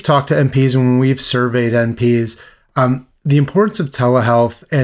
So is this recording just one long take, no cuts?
yes; 0 cuts

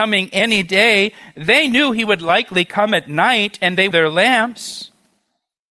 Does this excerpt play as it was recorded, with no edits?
no; 1 cut; at 3.9 s

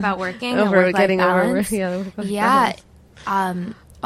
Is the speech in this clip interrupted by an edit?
no; 0 cuts

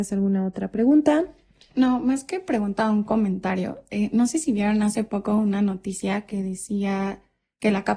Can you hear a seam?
no; 0 cuts

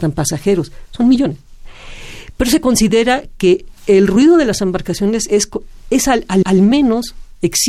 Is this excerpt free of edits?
no; 1 cut; at 6.4 s

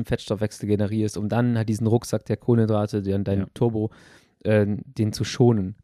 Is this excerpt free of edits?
yes; 0 cuts

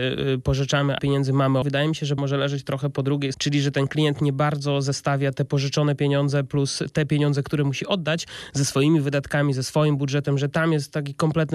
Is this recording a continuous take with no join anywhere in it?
no; 4 cuts; at 1.0 s, 1.6 s, 2.2 s, 3.3 s

